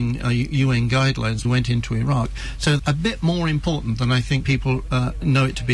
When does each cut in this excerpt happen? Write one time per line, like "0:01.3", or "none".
0:01.4
0:02.8
0:04.4

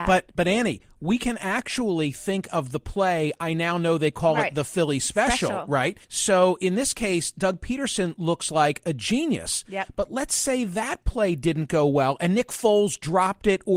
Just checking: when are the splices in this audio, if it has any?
0:06.0

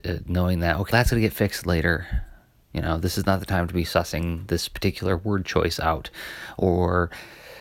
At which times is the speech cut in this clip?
0:00.9

